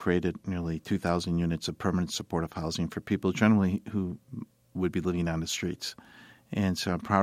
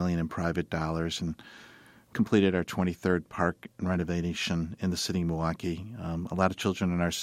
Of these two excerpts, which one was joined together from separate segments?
second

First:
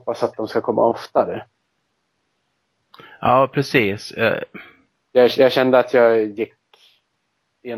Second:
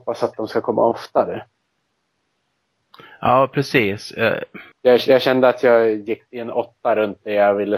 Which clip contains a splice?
second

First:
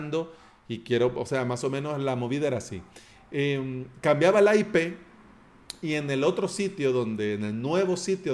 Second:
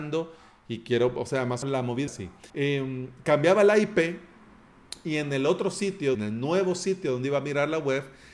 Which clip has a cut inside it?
second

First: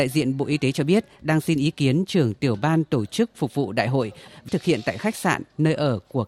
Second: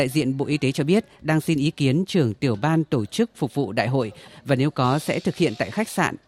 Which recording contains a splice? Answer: first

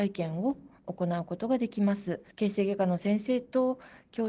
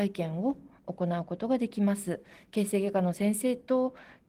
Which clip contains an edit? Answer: first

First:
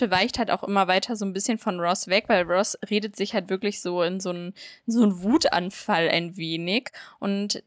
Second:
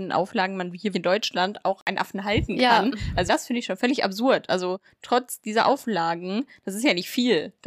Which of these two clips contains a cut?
second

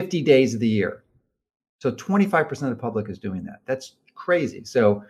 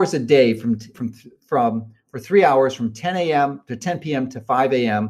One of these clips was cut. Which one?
second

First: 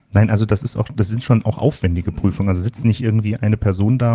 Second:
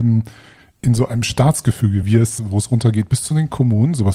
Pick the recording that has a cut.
second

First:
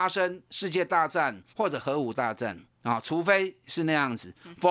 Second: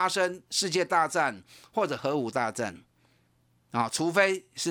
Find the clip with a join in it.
first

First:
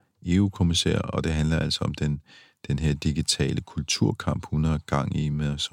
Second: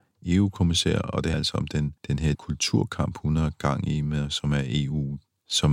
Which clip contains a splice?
second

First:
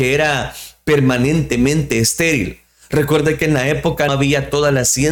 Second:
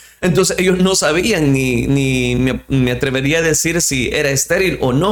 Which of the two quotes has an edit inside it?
first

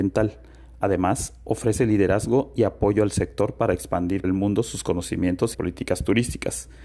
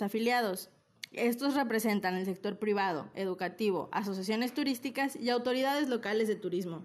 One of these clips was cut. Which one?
first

